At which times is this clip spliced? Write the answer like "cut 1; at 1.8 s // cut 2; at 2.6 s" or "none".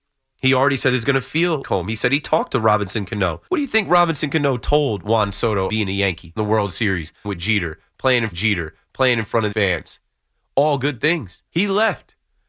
cut 1; at 1.6 s // cut 2; at 3.5 s // cut 3; at 5.7 s // cut 4; at 6.4 s // cut 5; at 7.2 s // cut 6; at 8.3 s // cut 7; at 9.5 s // cut 8; at 11.5 s